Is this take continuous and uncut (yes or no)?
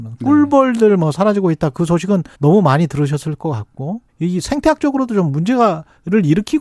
no